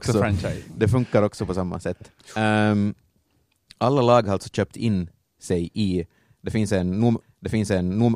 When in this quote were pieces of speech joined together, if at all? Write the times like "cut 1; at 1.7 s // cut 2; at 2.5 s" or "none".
cut 1; at 7.2 s